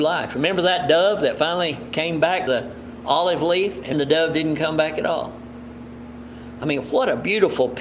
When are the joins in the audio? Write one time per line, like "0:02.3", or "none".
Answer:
0:02.5
0:03.9